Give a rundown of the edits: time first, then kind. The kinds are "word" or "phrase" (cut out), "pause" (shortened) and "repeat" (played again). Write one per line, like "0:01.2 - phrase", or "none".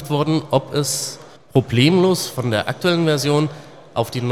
0:01.4 - pause